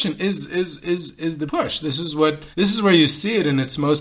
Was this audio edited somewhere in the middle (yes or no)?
yes